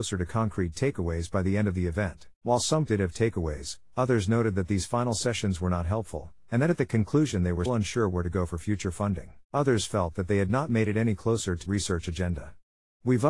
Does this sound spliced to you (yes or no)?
yes